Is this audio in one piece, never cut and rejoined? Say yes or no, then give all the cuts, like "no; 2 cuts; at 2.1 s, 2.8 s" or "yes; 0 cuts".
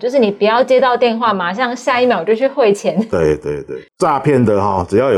no; 1 cut; at 3.9 s